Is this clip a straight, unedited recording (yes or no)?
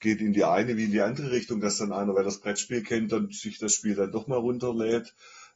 yes